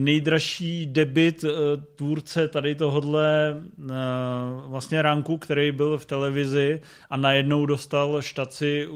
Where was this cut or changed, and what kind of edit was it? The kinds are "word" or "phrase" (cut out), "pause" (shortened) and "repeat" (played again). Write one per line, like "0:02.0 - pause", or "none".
none